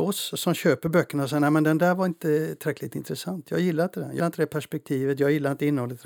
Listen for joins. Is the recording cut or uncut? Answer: cut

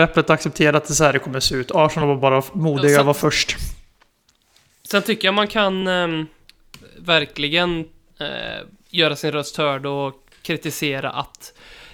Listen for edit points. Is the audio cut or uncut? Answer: uncut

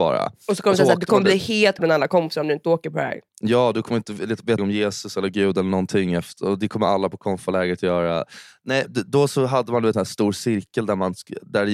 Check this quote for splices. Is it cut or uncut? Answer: cut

